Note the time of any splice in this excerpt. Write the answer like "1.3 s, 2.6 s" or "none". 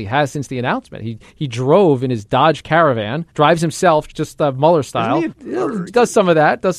3.3 s, 4.1 s, 5.3 s, 5.9 s